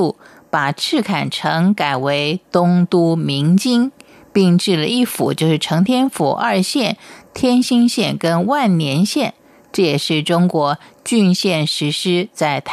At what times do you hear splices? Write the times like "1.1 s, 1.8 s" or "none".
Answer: none